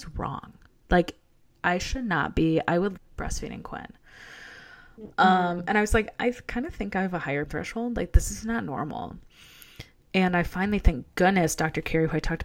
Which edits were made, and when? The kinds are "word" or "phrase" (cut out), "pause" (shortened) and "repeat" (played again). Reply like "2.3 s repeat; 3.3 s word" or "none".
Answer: 3.0 s phrase; 7.5 s word